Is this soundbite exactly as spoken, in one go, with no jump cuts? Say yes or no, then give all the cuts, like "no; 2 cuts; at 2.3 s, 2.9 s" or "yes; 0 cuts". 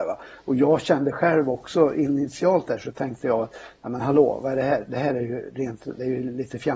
yes; 0 cuts